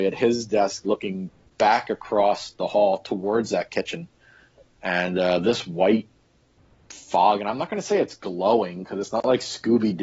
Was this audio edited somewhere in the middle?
no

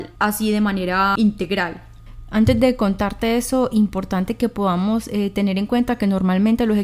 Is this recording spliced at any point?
no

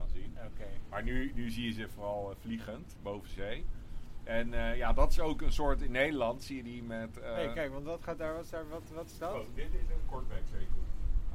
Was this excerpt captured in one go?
yes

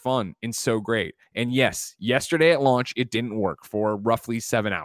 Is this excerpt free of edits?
yes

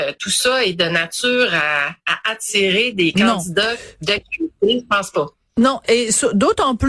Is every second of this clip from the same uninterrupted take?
yes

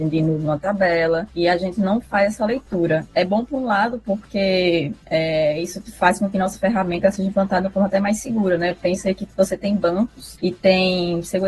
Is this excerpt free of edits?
yes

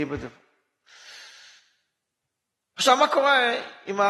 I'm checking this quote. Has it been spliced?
no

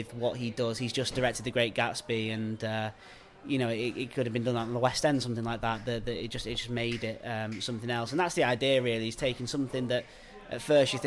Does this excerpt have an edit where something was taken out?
no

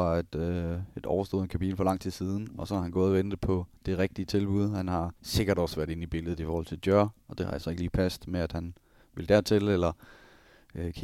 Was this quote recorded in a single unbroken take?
no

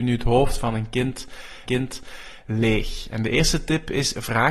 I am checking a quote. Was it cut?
yes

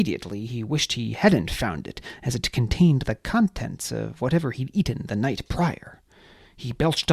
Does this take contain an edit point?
no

